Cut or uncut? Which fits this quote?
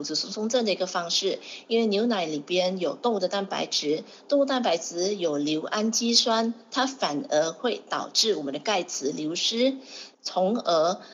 cut